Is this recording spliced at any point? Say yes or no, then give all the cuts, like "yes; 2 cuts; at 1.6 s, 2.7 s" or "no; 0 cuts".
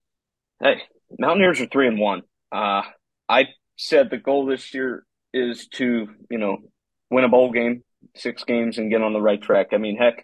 no; 0 cuts